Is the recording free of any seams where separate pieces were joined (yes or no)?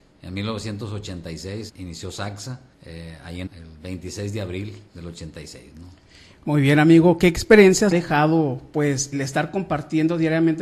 no